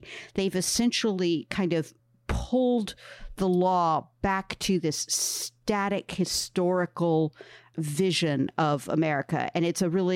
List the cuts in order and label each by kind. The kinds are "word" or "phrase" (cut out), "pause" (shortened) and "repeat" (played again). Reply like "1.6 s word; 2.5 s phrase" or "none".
none